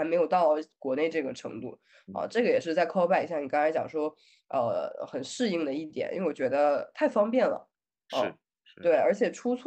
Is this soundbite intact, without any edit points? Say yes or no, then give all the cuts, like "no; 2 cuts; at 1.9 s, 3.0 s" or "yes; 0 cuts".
yes; 0 cuts